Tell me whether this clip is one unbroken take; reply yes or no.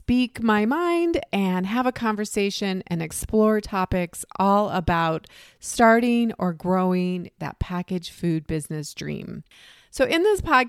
yes